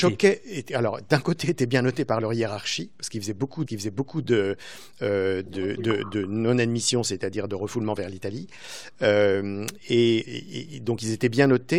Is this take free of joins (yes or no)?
no